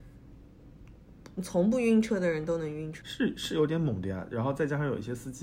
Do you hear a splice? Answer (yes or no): yes